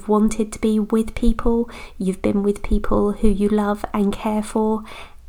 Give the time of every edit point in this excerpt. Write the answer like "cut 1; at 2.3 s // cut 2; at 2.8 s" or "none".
none